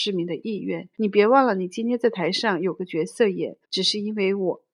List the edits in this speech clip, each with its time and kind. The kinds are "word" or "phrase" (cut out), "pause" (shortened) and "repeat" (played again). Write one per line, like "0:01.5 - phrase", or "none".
0:00.9 - pause
0:03.6 - pause